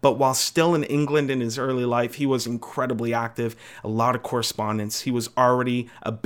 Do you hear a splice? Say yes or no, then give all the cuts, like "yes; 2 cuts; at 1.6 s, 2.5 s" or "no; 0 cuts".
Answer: no; 0 cuts